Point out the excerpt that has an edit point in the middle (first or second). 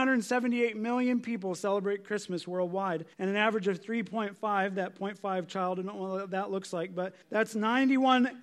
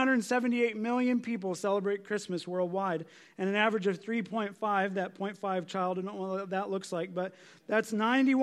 first